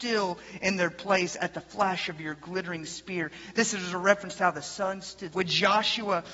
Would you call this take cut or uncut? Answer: cut